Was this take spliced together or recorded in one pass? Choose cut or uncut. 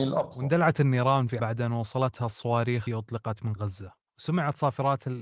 cut